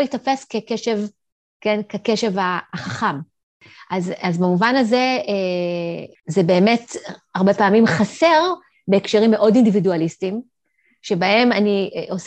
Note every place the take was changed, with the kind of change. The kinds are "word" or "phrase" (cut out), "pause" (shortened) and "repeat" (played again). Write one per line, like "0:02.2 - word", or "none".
none